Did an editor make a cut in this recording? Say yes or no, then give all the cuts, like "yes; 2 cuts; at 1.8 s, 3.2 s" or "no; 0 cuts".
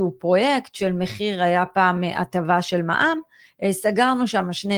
no; 0 cuts